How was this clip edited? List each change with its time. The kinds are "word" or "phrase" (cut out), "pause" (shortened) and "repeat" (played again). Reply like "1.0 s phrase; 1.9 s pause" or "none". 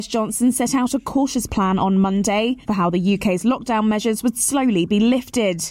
2.6 s pause